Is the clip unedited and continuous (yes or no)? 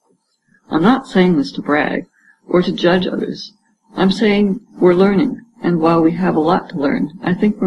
yes